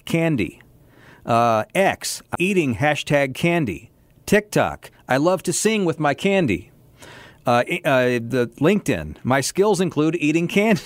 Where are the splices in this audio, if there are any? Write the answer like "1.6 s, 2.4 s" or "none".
2.3 s

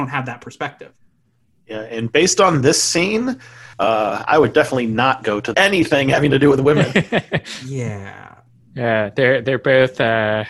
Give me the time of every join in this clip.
3.7 s, 5.5 s

